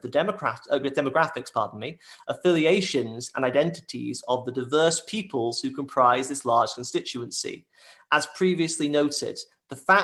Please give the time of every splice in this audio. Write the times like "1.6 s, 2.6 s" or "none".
none